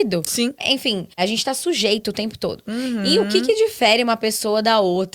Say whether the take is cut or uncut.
cut